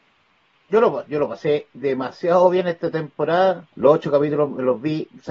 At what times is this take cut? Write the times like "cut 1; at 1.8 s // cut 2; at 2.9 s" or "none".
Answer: cut 1; at 3.7 s